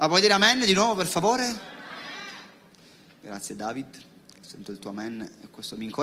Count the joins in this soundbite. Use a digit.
0